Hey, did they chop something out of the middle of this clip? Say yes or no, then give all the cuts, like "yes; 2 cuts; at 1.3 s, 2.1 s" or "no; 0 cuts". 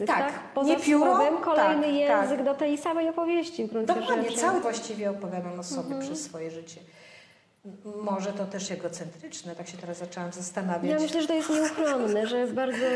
yes; 2 cuts; at 4.6 s, 8.7 s